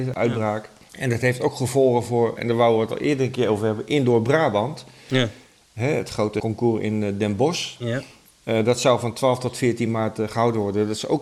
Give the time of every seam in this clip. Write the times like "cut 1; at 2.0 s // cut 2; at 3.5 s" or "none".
cut 1; at 2.4 s

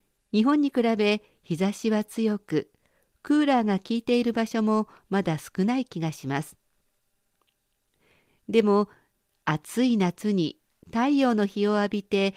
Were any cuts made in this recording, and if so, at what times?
none

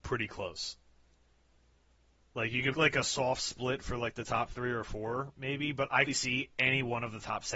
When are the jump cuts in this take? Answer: cut 1; at 2.7 s // cut 2; at 6.1 s

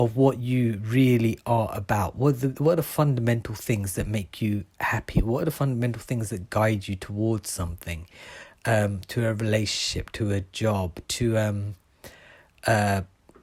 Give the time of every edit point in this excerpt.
none

